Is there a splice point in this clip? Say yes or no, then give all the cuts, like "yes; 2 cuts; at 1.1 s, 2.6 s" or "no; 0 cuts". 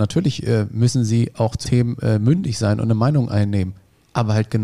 yes; 1 cut; at 1.6 s